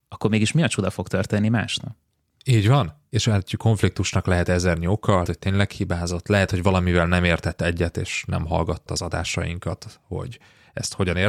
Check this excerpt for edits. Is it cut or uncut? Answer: cut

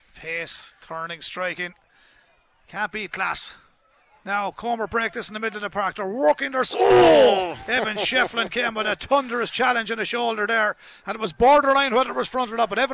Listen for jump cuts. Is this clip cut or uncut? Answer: uncut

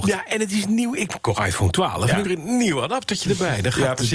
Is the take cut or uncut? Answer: cut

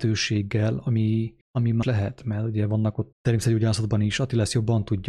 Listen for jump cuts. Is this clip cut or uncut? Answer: cut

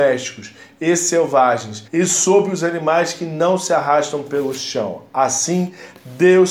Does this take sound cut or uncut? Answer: cut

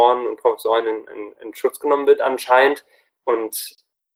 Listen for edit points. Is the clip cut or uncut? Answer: uncut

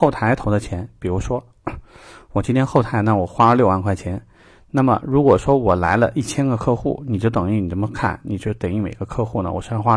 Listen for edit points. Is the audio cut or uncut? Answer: uncut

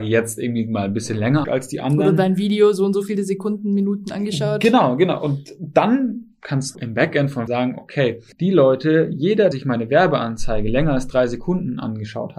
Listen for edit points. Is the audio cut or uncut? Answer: cut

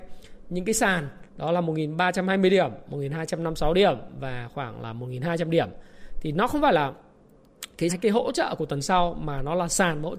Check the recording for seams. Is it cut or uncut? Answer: cut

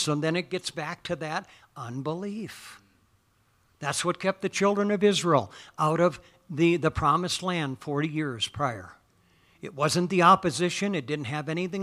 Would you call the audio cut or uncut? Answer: uncut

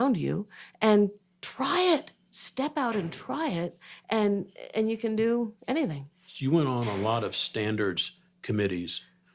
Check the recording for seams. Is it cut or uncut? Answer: uncut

